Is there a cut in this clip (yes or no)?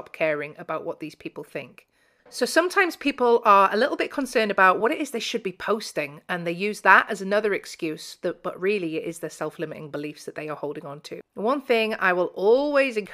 no